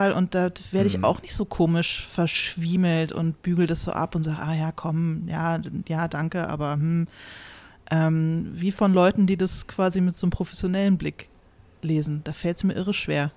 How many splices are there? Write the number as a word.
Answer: zero